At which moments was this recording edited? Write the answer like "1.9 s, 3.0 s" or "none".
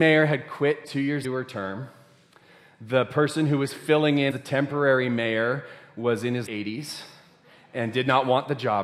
1.2 s, 4.3 s, 6.5 s